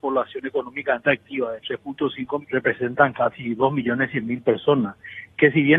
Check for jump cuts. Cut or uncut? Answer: cut